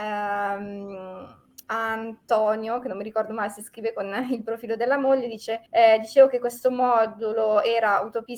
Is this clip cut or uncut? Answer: cut